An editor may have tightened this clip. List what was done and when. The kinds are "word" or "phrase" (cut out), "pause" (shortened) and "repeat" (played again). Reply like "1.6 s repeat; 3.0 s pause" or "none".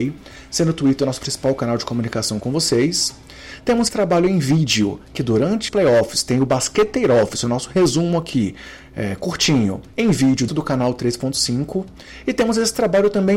3.9 s word; 5.7 s word; 9.9 s pause; 10.5 s word